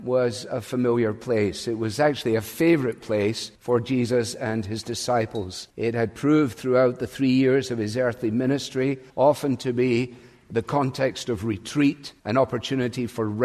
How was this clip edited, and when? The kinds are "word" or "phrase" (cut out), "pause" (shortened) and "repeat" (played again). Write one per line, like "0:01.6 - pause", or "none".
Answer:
0:03.6 - pause
0:05.7 - pause
0:09.1 - pause
0:12.2 - pause